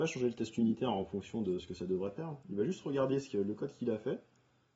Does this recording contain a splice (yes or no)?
no